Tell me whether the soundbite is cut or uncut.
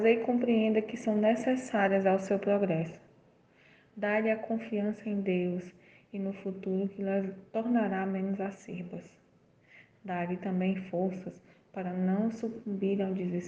uncut